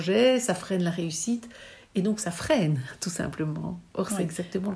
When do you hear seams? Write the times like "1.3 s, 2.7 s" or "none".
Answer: none